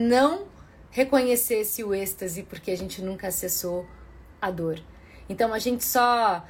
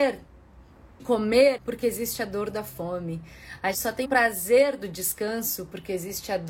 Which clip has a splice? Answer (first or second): second